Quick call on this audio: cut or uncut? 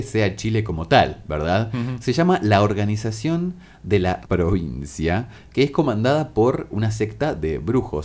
cut